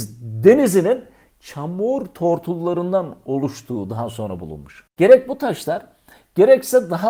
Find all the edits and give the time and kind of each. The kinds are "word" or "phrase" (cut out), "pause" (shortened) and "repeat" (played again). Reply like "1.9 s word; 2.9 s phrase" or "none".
none